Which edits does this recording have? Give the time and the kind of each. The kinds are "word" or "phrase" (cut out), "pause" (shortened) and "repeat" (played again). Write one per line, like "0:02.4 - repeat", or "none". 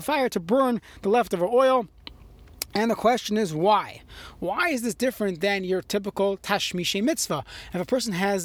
none